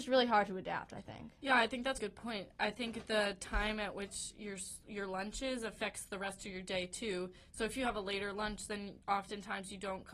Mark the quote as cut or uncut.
cut